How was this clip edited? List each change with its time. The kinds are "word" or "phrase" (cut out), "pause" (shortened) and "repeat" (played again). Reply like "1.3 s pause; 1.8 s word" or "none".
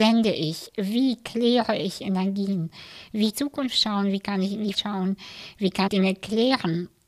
3.3 s phrase; 4.7 s word; 5.9 s word